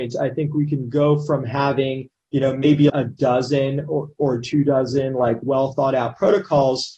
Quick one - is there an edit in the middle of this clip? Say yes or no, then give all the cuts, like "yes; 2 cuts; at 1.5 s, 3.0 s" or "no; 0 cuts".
yes; 1 cut; at 2.9 s